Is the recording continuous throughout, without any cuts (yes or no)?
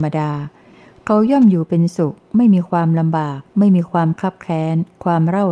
no